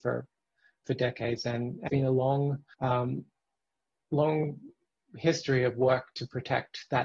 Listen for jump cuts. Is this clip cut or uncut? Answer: cut